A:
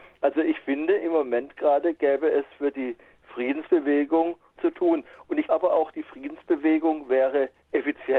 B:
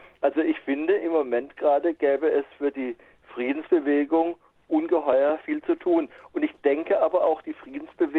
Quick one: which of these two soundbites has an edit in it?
A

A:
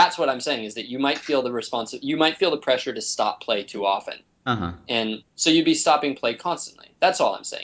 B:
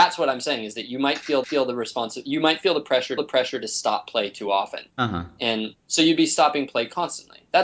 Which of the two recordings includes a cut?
B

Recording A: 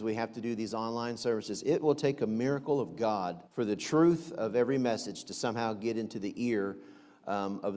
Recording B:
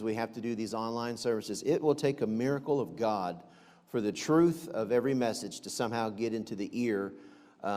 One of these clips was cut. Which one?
A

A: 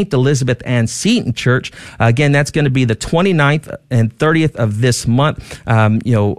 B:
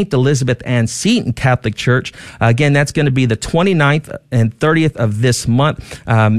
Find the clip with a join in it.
A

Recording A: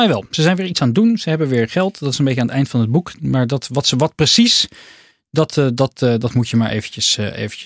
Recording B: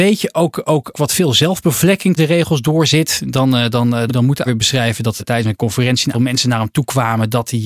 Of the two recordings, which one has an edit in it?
B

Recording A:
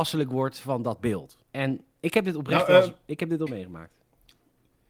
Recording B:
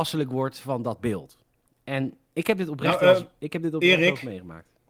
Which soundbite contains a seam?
A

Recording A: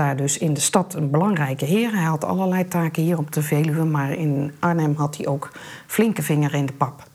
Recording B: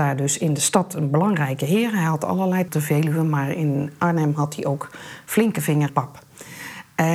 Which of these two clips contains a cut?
B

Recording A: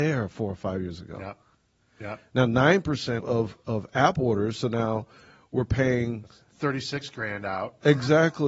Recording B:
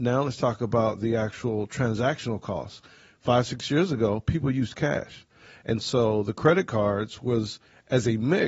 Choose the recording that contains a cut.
A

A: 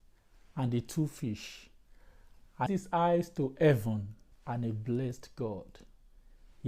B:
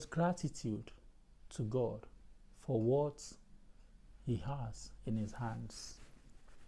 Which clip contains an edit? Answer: A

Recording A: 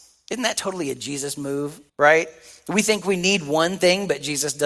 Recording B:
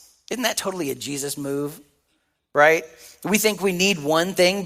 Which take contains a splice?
A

